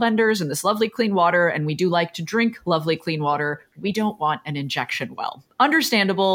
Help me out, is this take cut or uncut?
uncut